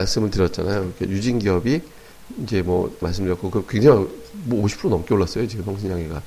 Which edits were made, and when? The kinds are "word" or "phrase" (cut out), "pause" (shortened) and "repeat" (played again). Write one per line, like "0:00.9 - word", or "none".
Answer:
0:03.0 - phrase